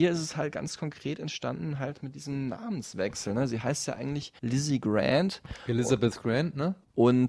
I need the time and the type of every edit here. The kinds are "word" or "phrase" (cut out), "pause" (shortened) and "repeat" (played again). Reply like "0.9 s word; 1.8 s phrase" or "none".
4.4 s pause